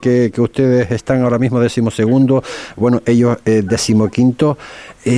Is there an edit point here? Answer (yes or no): no